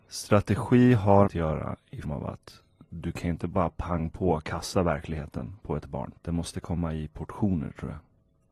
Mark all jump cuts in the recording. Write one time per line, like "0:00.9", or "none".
0:01.3
0:02.0
0:06.2